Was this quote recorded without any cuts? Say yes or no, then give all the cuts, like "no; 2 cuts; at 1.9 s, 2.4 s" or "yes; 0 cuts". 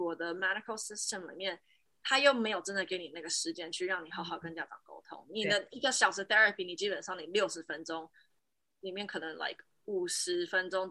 yes; 0 cuts